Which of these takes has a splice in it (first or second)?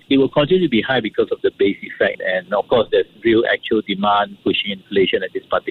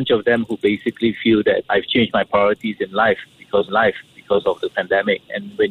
second